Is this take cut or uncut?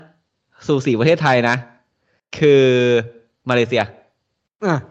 uncut